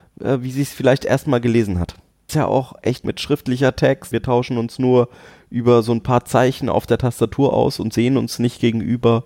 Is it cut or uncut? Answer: cut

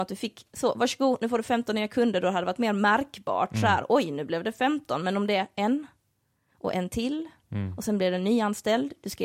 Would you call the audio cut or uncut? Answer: uncut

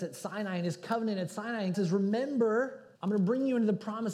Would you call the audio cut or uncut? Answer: cut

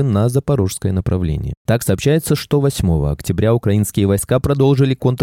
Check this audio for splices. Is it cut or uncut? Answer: uncut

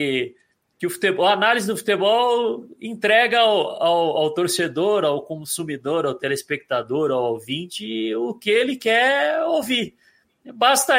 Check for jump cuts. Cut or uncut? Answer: uncut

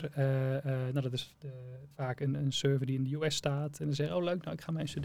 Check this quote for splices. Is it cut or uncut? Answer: cut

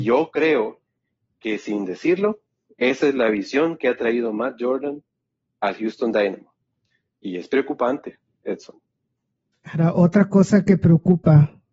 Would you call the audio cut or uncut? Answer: uncut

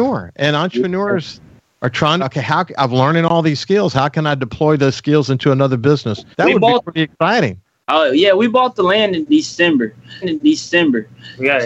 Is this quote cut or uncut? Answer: cut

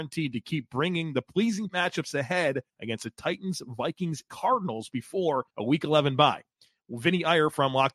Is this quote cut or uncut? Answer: cut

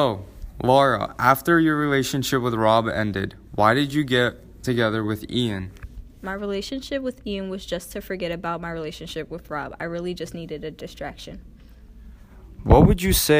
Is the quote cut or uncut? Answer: uncut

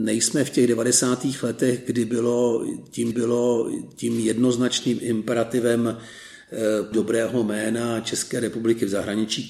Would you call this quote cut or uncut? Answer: cut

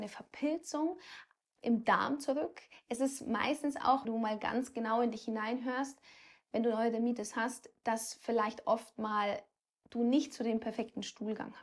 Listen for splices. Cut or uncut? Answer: cut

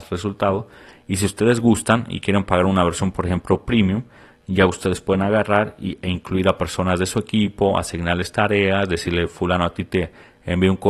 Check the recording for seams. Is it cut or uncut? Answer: uncut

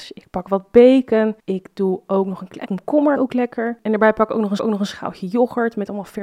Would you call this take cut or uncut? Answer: cut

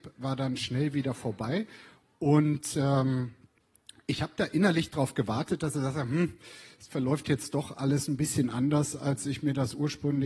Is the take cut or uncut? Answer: uncut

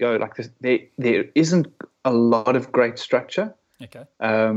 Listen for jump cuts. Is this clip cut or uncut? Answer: uncut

